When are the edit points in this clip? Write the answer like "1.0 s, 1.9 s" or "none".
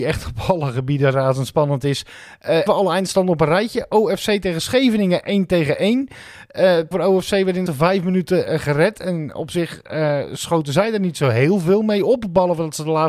2.7 s, 6.9 s, 7.7 s